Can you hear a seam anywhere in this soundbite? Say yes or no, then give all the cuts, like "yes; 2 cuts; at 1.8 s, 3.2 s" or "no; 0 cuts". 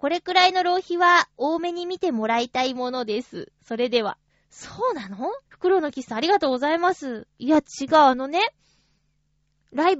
yes; 2 cuts; at 4.3 s, 5.4 s